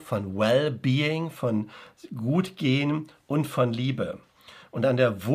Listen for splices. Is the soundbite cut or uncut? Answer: uncut